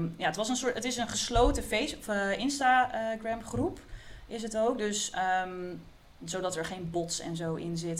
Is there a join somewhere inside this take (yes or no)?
no